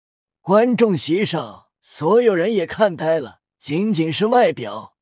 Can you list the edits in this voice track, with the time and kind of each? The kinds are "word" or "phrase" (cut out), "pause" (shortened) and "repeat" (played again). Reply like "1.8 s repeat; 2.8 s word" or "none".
1.7 s pause; 3.5 s pause